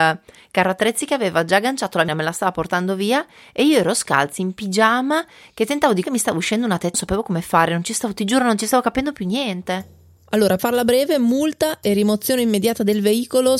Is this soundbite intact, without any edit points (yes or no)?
no